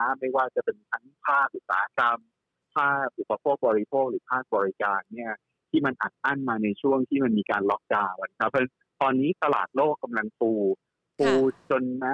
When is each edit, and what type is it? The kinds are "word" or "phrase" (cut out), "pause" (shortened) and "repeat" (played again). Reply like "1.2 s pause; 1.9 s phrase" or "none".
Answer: none